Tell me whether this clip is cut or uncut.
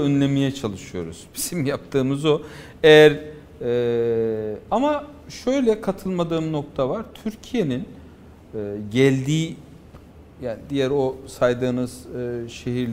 uncut